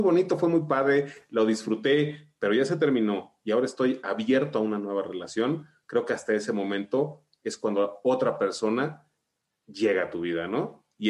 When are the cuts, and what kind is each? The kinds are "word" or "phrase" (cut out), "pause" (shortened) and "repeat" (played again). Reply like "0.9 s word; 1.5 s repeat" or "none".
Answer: none